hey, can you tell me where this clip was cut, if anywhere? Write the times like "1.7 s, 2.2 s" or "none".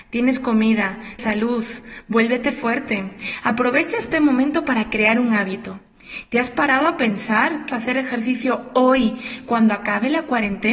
1.2 s, 7.7 s